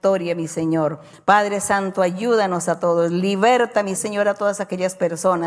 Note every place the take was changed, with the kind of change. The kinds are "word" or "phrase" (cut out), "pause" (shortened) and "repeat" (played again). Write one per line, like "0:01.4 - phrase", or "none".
0:04.0 - phrase